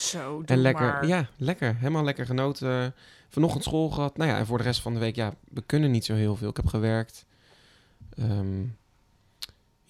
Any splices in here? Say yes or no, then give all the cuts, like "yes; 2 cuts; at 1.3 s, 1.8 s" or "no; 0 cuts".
no; 0 cuts